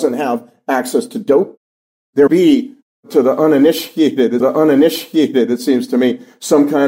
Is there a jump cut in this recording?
yes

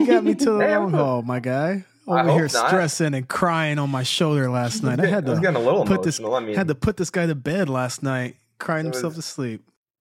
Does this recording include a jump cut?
no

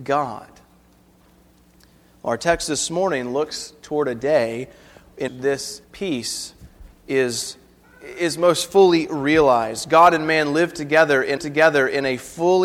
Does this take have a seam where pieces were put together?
yes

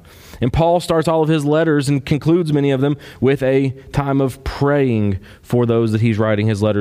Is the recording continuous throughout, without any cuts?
yes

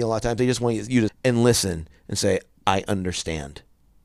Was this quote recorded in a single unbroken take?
no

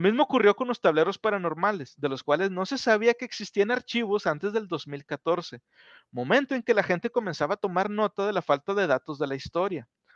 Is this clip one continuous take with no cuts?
yes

